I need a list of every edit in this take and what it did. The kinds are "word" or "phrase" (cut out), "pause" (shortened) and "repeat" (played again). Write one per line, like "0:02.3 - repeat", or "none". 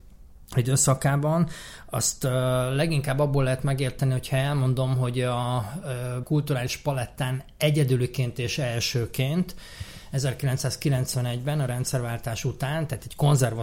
0:06.2 - word